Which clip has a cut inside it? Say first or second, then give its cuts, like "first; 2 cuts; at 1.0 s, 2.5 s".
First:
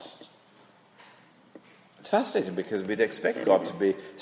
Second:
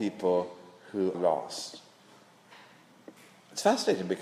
second; 1 cut; at 1.1 s